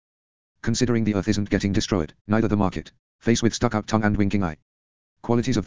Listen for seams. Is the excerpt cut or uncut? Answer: cut